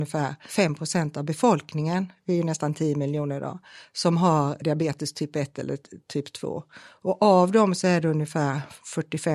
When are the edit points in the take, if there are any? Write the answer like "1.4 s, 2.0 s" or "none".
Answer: 4.6 s